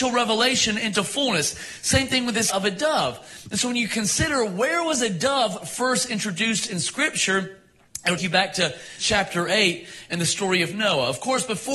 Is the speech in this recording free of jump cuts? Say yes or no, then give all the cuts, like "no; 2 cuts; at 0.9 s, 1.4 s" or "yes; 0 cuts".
no; 3 cuts; at 2.5 s, 8.2 s, 9.0 s